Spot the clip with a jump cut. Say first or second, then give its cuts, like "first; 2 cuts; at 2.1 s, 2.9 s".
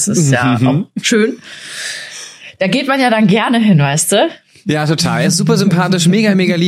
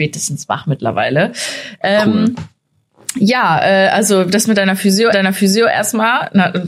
second; 1 cut; at 5.1 s